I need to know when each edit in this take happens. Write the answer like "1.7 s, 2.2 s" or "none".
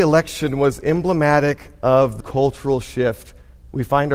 2.2 s